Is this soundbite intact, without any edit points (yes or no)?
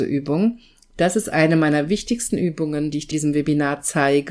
no